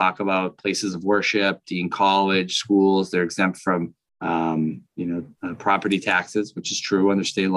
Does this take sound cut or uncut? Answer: cut